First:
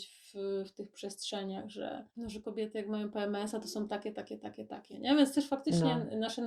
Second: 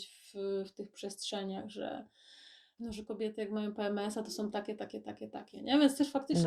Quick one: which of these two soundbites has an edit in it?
first; 1 cut; at 2.1 s

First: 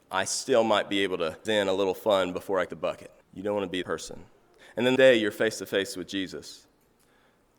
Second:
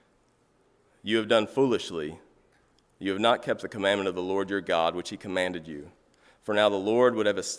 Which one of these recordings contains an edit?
first; 5 cuts; at 1.5 s, 2.7 s, 3.2 s, 3.8 s, 5.0 s

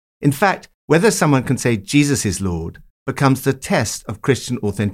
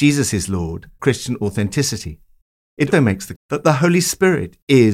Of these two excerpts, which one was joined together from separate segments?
second; 3 cuts; at 1.0 s, 2.9 s, 3.4 s

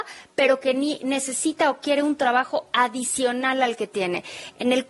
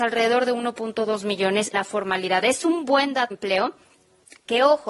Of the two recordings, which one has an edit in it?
second; 2 cuts; at 1.7 s, 3.3 s

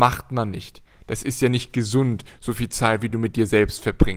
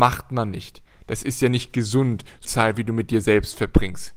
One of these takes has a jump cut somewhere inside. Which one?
second; 1 cut; at 2.4 s

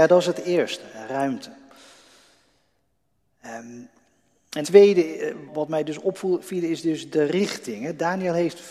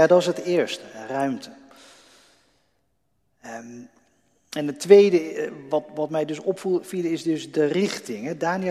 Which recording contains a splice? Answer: first; 2 cuts; at 4.6 s, 5.5 s

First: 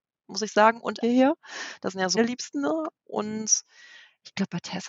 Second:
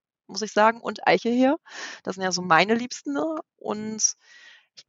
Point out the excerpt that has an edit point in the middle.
first; 2 cuts; at 1.0 s, 2.1 s

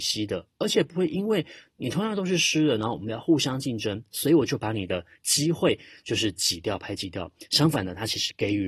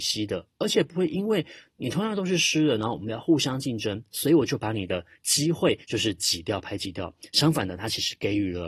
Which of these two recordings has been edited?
second; 1 cut; at 5.8 s

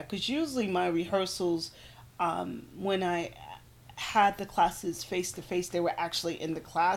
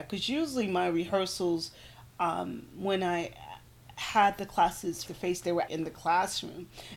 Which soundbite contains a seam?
second; 2 cuts; at 5.1 s, 5.7 s

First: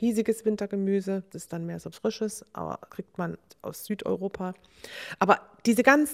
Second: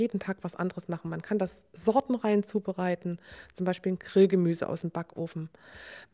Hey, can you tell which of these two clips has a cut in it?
first; 3 cuts; at 1.3 s, 1.9 s, 2.9 s

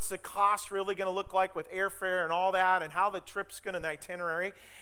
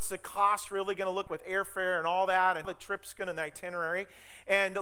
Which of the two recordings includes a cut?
second; 2 cuts; at 1.3 s, 2.6 s

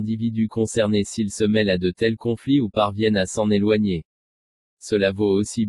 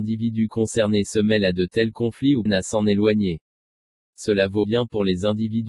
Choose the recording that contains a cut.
second; 3 cuts; at 1.1 s, 2.5 s, 4.6 s

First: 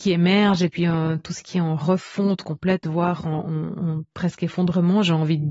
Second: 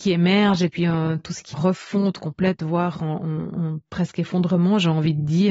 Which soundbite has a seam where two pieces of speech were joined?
second; 1 cut; at 1.5 s

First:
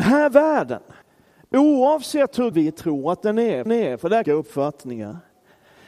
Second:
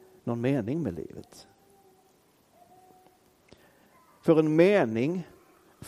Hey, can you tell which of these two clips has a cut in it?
first; 4 cuts; at 1.0 s, 2.5 s, 3.7 s, 4.2 s

